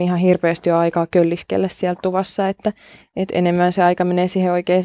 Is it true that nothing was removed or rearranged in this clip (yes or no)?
yes